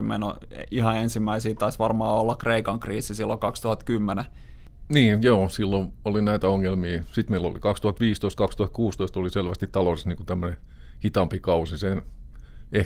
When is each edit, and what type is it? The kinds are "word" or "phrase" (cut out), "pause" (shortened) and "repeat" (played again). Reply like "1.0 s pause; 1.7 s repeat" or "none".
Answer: none